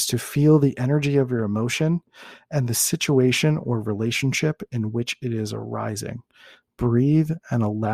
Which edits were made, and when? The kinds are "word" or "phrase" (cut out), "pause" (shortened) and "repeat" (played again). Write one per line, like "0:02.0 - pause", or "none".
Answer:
none